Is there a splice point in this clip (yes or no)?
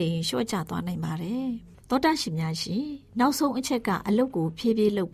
no